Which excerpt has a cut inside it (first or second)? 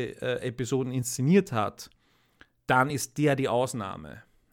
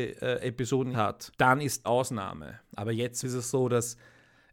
second